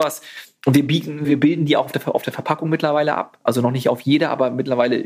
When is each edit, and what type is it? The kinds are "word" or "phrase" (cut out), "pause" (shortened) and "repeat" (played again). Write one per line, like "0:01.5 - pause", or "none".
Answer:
0:01.2 - word